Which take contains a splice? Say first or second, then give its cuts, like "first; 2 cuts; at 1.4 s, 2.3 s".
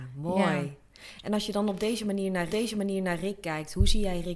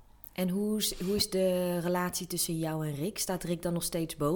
first; 1 cut; at 2.5 s